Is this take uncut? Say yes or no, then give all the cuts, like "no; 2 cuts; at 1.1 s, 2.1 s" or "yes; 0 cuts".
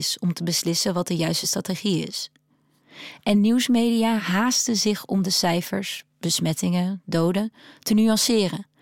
yes; 0 cuts